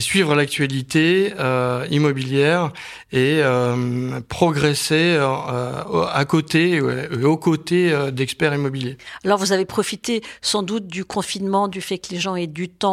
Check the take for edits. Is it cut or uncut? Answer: uncut